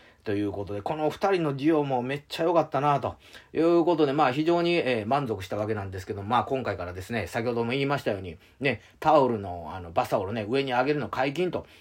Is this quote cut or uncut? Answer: uncut